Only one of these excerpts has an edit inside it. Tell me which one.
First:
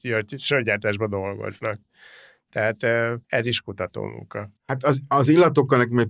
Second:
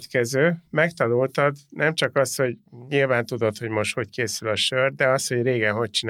first; 2 cuts; at 3.2 s, 4.6 s

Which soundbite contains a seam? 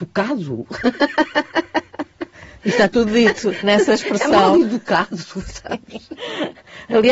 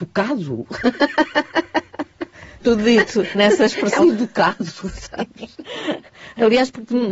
second; 2 cuts; at 2.6 s, 4.0 s

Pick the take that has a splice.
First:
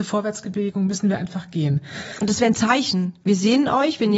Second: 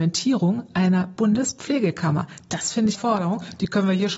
second; 1 cut; at 2.9 s

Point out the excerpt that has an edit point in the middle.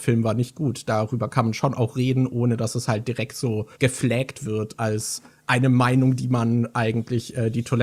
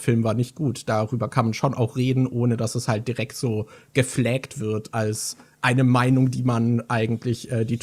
first; 1 cut; at 3.7 s

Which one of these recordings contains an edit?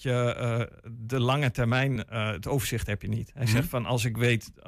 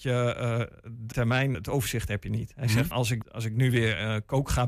second; 4 cuts; at 1.1 s, 1.5 s, 2.9 s, 3.2 s

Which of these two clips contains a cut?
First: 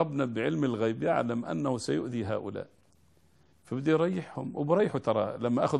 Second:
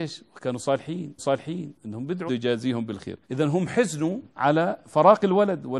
second; 4 cuts; at 1.2 s, 2.3 s, 3.2 s, 4.3 s

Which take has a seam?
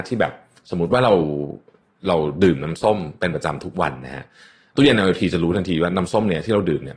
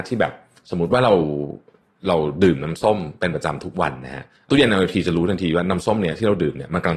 second; 1 cut; at 4.4 s

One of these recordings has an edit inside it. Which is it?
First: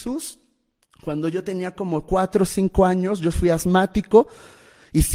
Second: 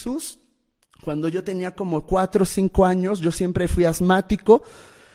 first; 1 cut; at 3.3 s

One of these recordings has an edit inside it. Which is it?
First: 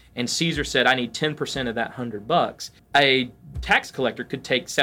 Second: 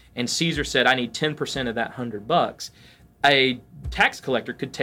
first; 1 cut; at 2.8 s

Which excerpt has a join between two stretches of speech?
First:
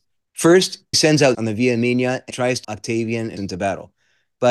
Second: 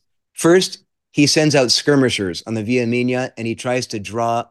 first; 5 cuts; at 0.9 s, 1.3 s, 2.3 s, 2.6 s, 3.4 s

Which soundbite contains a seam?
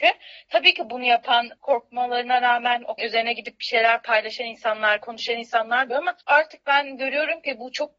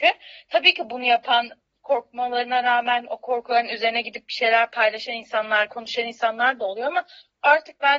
first; 4 cuts; at 1.6 s, 3.0 s, 5.9 s, 6.2 s

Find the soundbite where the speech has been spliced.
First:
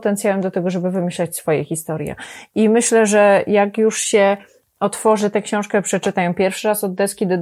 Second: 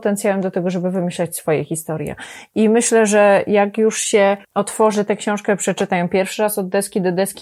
second; 1 cut; at 4.4 s

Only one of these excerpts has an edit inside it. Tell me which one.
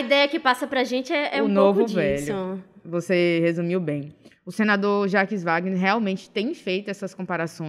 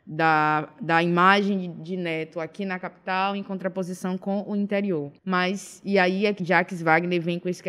second; 1 cut; at 5.2 s

